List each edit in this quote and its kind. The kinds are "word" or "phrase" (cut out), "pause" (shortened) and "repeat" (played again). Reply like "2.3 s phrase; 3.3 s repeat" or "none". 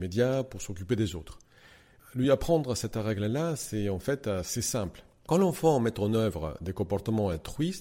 none

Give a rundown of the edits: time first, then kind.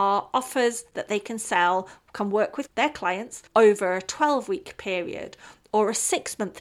3.5 s pause

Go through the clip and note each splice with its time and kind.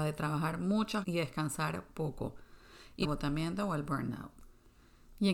1.0 s word; 3.0 s phrase

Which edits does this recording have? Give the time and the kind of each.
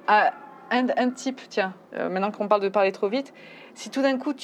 1.9 s pause

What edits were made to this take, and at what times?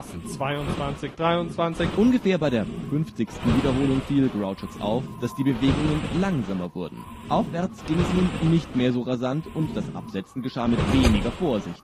none

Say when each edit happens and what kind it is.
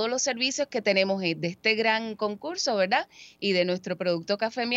none

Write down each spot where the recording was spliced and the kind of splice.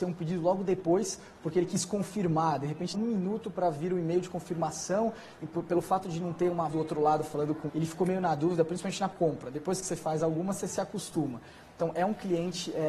2.9 s word; 5.4 s word; 6.7 s word; 7.7 s word; 9.1 s word

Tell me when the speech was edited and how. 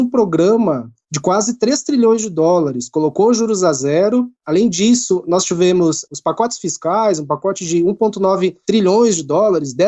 none

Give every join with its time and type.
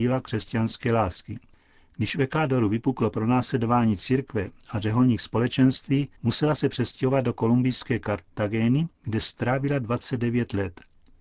6.1 s pause; 8.9 s pause

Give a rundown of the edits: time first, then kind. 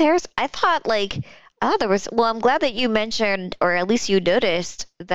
none

